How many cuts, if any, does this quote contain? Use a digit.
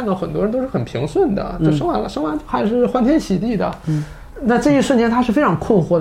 1